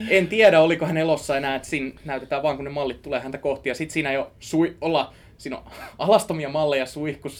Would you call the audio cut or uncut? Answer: uncut